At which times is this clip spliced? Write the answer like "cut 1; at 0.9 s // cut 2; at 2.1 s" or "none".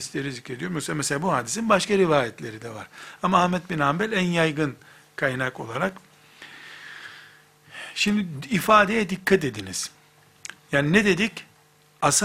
none